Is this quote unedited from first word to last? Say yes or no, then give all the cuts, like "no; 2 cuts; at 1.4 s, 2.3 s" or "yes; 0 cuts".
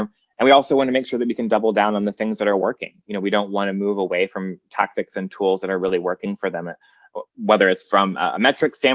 yes; 0 cuts